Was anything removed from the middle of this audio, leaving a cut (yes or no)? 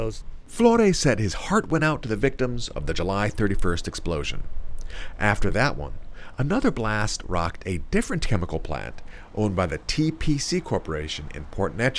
no